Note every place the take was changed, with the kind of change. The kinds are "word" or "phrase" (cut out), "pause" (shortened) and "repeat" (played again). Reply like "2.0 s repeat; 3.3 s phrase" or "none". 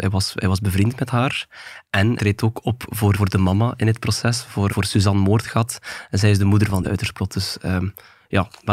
2.2 s word; 3.1 s word; 4.7 s word; 6.8 s word